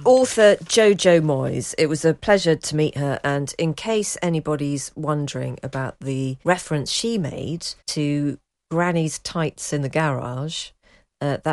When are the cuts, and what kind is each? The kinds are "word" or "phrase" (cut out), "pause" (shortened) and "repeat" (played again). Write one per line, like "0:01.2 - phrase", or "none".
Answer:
0:06.4 - pause
0:07.8 - pause